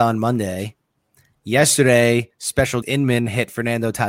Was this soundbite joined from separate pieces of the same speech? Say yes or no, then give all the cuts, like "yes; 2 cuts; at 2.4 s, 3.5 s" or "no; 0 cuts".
yes; 1 cut; at 2.8 s